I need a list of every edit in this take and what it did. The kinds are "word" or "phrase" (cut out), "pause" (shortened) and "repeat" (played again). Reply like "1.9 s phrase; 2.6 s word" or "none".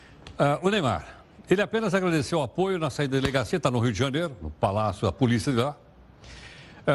none